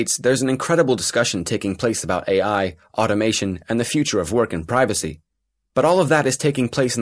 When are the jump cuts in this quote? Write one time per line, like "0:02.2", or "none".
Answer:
none